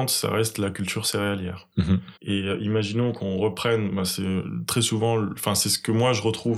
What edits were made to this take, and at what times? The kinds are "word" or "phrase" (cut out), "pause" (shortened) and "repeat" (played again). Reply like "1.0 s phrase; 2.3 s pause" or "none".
2.2 s pause